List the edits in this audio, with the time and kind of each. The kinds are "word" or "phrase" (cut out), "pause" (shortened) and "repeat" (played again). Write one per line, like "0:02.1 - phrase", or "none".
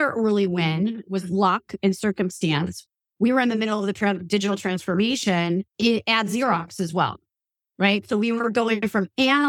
0:05.7 - pause